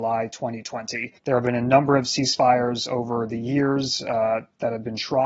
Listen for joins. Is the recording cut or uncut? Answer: cut